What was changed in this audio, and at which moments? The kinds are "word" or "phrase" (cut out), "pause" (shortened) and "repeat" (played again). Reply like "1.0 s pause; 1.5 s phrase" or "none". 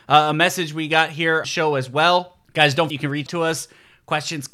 1.4 s phrase; 2.9 s word; 3.3 s word